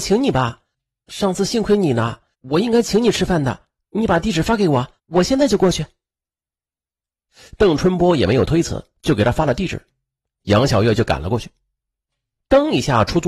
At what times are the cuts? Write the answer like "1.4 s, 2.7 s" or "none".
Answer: 2.3 s, 5.0 s, 9.0 s